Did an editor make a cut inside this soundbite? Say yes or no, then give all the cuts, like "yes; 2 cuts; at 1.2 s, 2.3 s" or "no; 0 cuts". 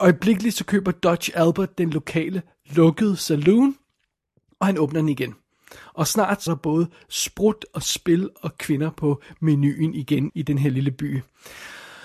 yes; 2 cuts; at 6.5 s, 10.3 s